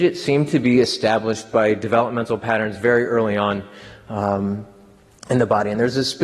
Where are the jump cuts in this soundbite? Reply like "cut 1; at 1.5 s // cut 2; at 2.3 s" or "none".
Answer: none

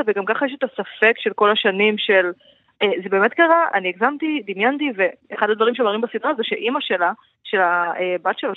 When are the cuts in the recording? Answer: none

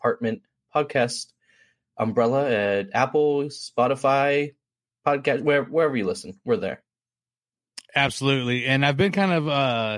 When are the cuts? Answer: none

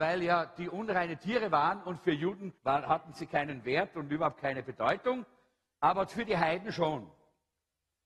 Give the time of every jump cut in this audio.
cut 1; at 2.6 s // cut 2; at 6.1 s

